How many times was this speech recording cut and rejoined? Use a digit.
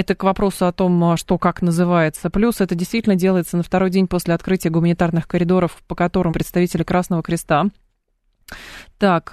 1